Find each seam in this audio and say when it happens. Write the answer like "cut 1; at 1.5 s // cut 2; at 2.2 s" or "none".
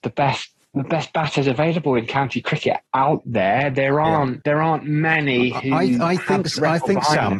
cut 1; at 2.9 s

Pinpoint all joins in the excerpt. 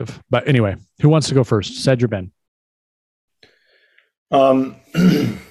none

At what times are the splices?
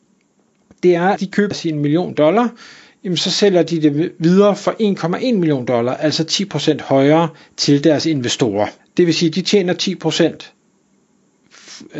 cut 1; at 1.2 s // cut 2; at 1.5 s // cut 3; at 8.8 s

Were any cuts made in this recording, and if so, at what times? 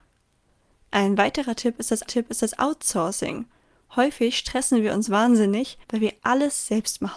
cut 1; at 2.1 s // cut 2; at 5.8 s

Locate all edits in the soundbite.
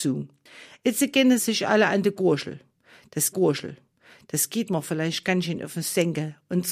cut 1; at 3.3 s

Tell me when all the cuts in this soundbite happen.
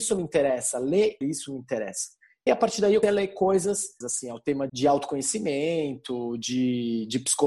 cut 1; at 1.2 s // cut 2; at 2.5 s // cut 3; at 3.0 s // cut 4; at 4.0 s // cut 5; at 4.7 s

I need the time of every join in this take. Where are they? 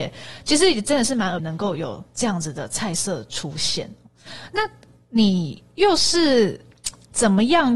cut 1; at 1.4 s

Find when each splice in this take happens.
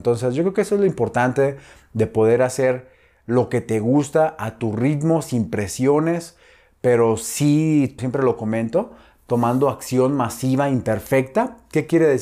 cut 1; at 8.0 s

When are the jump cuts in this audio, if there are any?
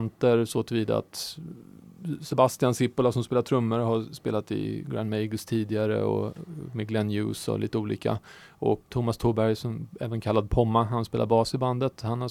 cut 1; at 8.9 s

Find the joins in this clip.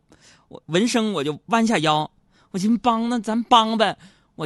none

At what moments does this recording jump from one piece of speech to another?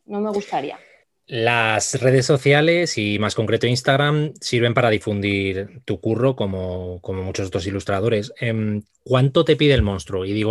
cut 1; at 1.0 s

